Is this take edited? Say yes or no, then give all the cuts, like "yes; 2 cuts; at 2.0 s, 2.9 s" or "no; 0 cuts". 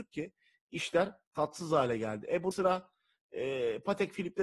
yes; 2 cuts; at 1.3 s, 2.5 s